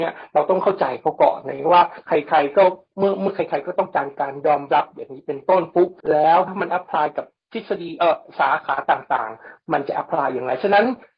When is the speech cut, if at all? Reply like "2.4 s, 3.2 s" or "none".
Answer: 6.0 s